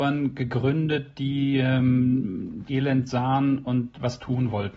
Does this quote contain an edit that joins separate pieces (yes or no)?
yes